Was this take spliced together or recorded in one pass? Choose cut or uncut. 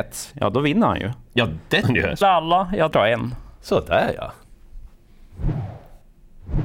cut